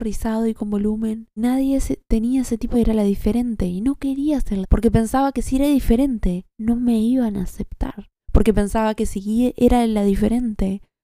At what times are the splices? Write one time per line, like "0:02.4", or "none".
0:01.4
0:02.7
0:04.6
0:06.5
0:08.2